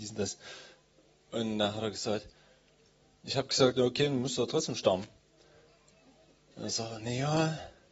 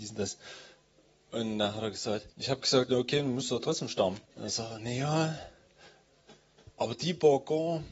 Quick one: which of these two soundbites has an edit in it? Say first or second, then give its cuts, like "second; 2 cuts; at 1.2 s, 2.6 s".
second; 2 cuts; at 2.3 s, 4.3 s